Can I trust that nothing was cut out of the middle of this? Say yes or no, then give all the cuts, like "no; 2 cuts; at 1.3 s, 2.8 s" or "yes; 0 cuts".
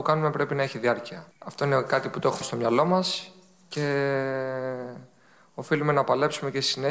no; 2 cuts; at 1.3 s, 2.4 s